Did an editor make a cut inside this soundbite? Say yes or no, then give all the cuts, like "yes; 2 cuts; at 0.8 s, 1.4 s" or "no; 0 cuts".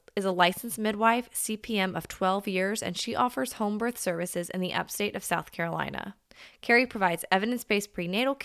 no; 0 cuts